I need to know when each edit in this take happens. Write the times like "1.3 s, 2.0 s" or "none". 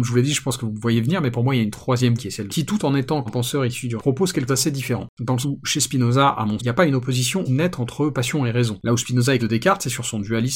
2.2 s, 2.5 s, 3.3 s, 4.0 s, 4.5 s, 5.4 s, 6.6 s, 7.5 s, 9.4 s